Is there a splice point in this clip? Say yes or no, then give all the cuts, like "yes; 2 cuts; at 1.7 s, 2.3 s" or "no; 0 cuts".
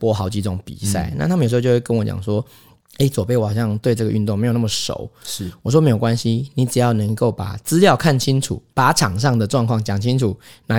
no; 0 cuts